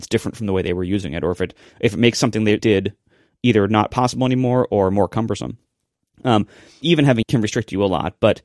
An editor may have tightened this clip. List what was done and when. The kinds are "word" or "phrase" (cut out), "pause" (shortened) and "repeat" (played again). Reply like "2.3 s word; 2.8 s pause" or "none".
2.6 s word; 6.8 s word; 7.2 s word